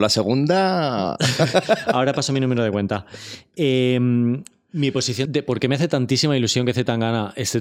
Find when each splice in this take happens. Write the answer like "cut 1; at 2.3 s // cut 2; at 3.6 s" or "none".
cut 1; at 5.3 s